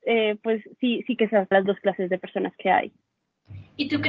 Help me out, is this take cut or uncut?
cut